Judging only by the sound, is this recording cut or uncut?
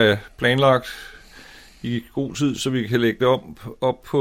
uncut